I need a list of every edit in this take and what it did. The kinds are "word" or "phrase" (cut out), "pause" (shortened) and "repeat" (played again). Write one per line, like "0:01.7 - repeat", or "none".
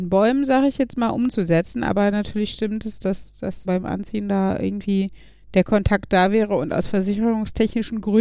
0:03.6 - word

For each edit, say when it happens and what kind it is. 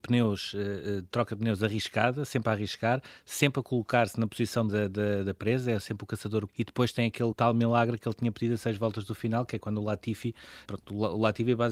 0:04.7 - phrase
0:06.5 - word
0:07.3 - phrase
0:10.7 - word

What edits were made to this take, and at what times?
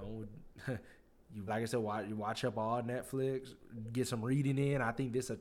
0:01.5 - word

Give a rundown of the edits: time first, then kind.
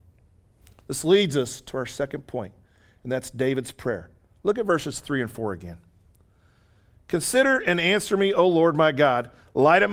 none

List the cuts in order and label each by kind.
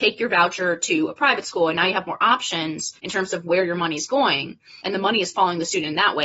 0:03.0 - pause
0:04.8 - pause

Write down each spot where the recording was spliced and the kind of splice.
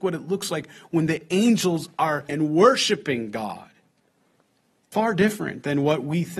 0:02.3 - word
0:04.9 - word

